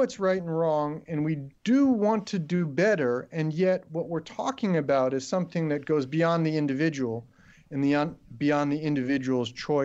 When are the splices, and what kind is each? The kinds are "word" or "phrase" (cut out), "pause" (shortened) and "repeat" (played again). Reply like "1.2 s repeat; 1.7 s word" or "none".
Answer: 1.6 s pause